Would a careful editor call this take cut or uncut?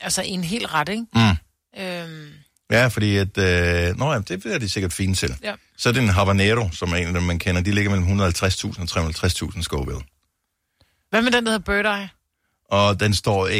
uncut